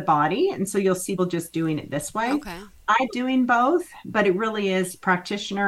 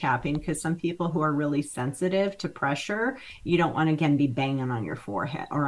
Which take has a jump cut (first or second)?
first